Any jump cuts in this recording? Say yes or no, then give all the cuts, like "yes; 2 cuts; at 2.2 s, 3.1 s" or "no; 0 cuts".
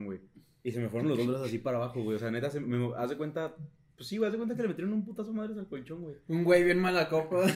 no; 0 cuts